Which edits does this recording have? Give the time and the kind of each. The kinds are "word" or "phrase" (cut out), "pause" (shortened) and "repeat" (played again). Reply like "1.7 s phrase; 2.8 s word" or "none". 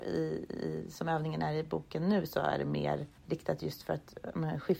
3.2 s pause